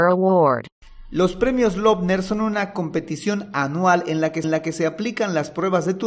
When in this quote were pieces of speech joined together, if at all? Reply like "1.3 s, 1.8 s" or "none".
4.4 s